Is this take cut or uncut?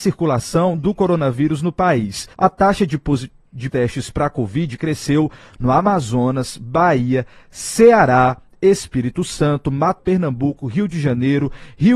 cut